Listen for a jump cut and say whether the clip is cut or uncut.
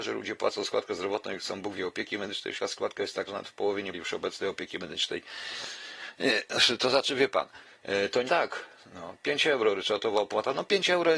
cut